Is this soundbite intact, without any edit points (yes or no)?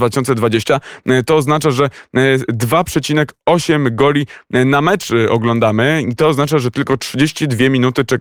yes